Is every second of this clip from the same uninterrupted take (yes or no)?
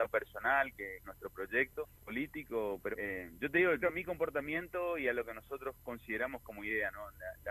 no